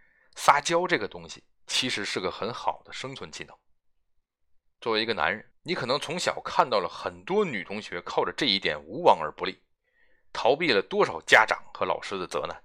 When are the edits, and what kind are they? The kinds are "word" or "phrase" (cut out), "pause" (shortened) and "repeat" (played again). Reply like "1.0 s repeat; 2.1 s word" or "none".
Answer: 1.5 s pause; 4.4 s pause; 5.5 s pause